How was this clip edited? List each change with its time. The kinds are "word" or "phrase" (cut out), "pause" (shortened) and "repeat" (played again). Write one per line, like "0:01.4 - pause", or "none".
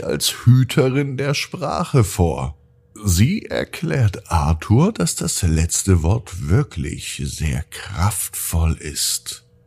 none